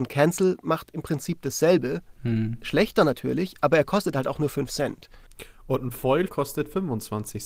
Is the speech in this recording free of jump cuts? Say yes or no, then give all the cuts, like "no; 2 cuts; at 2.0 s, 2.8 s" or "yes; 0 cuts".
no; 1 cut; at 6.3 s